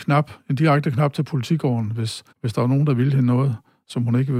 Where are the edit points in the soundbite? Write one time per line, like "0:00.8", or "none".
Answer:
0:02.3